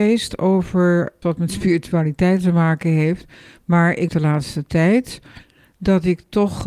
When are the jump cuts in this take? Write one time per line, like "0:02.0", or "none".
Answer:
0:01.2
0:04.1